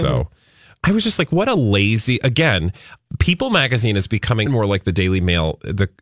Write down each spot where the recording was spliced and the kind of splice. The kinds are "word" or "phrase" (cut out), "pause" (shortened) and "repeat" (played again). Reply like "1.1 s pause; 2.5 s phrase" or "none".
4.5 s word